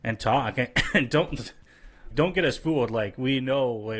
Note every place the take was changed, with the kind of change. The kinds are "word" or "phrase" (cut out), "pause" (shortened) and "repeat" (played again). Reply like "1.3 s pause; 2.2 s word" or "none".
2.1 s word